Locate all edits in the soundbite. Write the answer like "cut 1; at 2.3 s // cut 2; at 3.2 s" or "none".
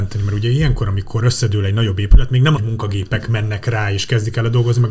cut 1; at 2.6 s